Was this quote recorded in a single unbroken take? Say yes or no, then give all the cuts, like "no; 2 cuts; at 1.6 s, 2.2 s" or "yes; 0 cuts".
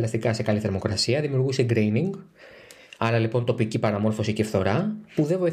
yes; 0 cuts